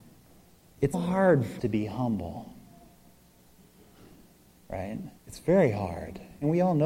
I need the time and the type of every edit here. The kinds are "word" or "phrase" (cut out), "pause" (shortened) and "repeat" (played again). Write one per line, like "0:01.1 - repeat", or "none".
0:00.9 - word
0:01.6 - word
0:05.2 - pause